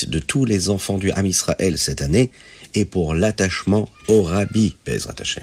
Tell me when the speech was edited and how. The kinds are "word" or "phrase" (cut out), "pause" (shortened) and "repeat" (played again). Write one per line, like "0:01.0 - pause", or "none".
0:03.9 - pause